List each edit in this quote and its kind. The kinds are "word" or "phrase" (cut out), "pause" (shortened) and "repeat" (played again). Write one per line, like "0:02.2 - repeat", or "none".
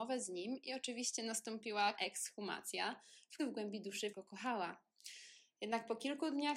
0:02.0 - word
0:03.4 - word
0:04.1 - word